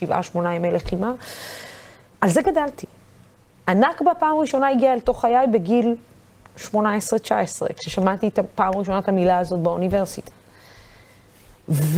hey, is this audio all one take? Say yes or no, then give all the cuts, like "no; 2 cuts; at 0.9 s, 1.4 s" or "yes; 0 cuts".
yes; 0 cuts